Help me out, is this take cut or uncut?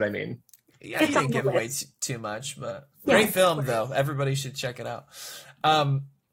cut